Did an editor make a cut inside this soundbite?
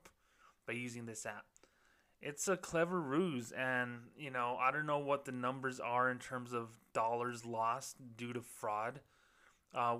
no; 0 cuts

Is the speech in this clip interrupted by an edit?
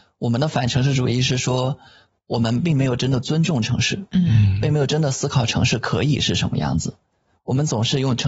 no; 0 cuts

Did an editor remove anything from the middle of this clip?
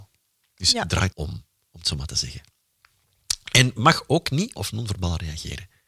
yes; 2 cuts; at 1.1 s, 4.6 s

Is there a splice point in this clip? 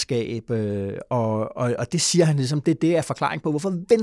no; 0 cuts

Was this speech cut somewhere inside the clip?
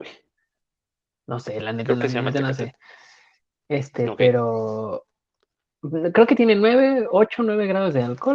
no; 0 cuts

